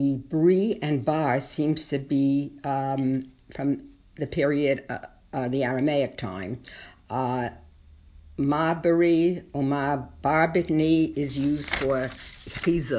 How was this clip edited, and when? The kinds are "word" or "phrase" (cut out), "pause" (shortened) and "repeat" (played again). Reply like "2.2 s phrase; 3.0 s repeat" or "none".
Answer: none